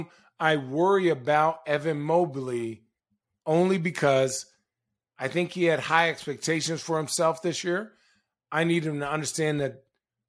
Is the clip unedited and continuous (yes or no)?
yes